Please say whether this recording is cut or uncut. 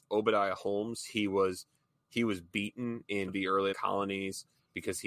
cut